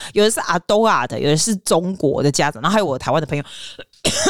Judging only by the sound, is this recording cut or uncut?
uncut